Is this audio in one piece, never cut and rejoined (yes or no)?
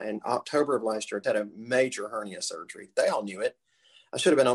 no